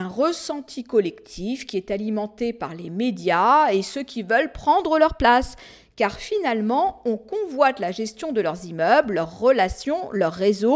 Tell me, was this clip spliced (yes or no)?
no